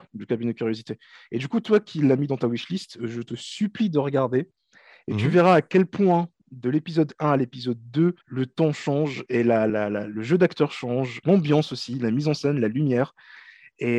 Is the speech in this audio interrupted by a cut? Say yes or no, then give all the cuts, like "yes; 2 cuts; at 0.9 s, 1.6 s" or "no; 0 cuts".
yes; 3 cuts; at 8.2 s, 9.7 s, 11.2 s